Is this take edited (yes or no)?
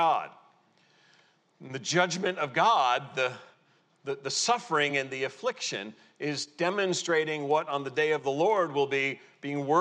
no